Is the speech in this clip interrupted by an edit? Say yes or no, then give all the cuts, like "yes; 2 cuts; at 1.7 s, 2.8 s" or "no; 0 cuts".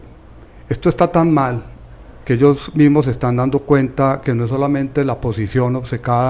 no; 0 cuts